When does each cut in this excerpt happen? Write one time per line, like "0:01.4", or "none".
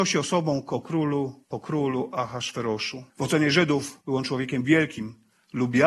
0:01.4
0:03.1
0:04.0